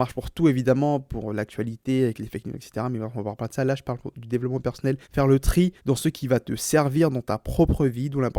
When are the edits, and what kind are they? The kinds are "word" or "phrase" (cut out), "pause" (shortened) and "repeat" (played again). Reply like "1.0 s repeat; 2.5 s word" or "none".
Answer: 5.0 s pause; 5.8 s pause